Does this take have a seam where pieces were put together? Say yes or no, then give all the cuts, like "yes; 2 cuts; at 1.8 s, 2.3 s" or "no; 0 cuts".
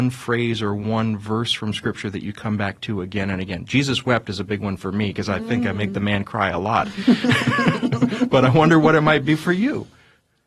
no; 0 cuts